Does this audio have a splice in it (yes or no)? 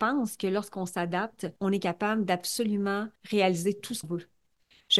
yes